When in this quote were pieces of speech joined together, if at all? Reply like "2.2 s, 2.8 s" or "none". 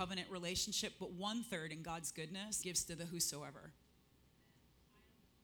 2.6 s